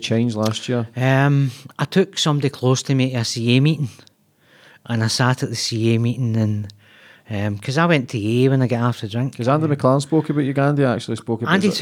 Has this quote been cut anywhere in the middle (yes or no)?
no